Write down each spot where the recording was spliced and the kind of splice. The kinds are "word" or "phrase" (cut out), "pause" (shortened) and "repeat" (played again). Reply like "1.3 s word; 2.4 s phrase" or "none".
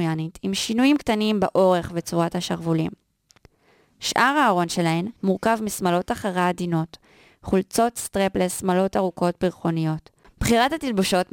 5.2 s pause